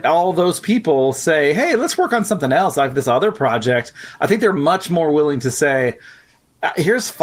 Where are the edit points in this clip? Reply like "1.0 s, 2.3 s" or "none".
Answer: none